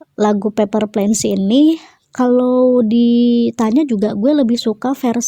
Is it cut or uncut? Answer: uncut